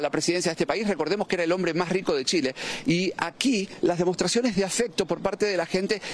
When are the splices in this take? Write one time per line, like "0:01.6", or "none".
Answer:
none

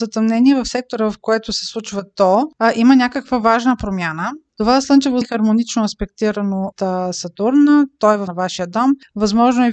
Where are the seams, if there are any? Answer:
0:05.2
0:06.7
0:08.3

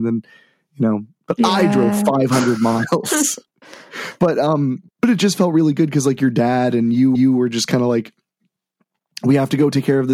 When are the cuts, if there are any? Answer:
0:03.5
0:04.9
0:07.1

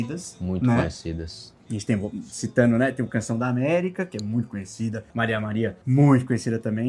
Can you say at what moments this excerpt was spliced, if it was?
0:05.1
0:05.8

